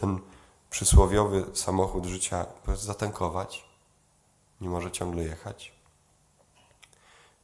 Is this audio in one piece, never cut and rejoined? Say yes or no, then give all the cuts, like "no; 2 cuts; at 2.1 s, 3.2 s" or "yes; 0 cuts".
yes; 0 cuts